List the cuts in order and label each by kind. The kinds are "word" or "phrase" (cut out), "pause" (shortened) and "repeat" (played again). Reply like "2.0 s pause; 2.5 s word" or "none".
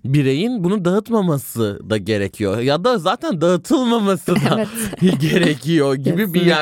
none